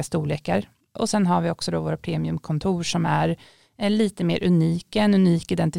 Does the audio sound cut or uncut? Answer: uncut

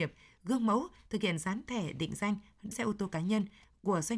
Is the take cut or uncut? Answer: cut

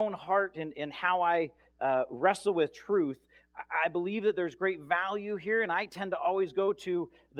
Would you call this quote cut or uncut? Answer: uncut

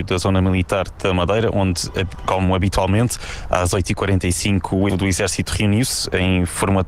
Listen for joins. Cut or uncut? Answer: cut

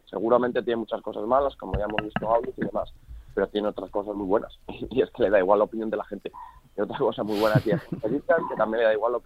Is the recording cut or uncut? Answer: uncut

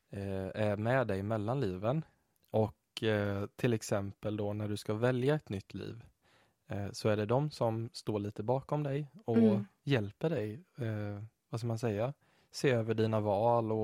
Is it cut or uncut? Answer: uncut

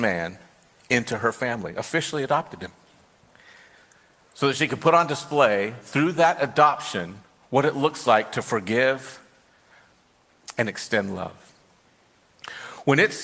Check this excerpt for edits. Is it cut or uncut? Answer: uncut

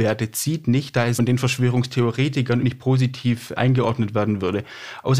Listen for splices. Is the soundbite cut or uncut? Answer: cut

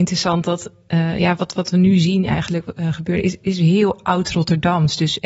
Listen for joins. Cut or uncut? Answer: uncut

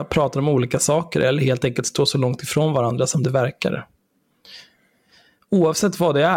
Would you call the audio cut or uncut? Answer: uncut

